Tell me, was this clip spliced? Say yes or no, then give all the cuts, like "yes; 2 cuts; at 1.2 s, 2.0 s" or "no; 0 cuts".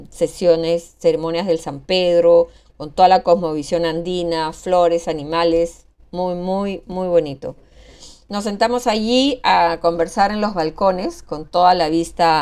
no; 0 cuts